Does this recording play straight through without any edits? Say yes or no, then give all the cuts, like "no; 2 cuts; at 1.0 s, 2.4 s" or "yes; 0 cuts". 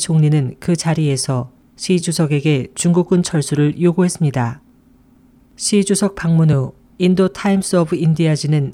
yes; 0 cuts